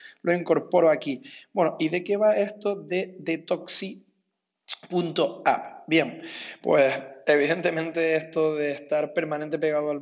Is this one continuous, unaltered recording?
yes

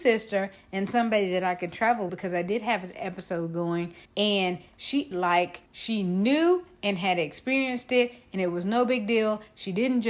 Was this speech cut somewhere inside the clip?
yes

